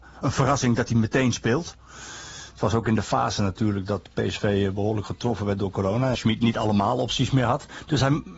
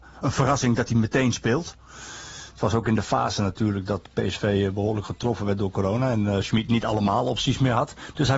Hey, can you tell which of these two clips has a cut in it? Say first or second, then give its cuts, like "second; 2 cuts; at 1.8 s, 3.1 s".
first; 1 cut; at 6.1 s